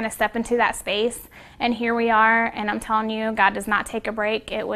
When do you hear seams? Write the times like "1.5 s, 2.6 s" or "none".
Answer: none